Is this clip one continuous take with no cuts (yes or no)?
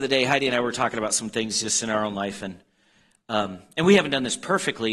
yes